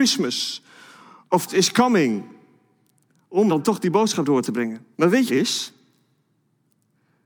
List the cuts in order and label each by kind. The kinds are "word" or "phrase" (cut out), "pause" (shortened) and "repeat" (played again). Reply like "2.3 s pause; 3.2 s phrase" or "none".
1.5 s word; 3.5 s word; 4.9 s pause; 5.3 s phrase

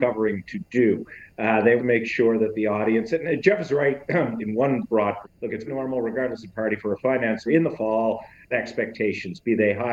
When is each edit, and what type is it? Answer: 1.8 s word; 5.2 s phrase; 5.7 s word; 7.5 s word; 8.5 s phrase

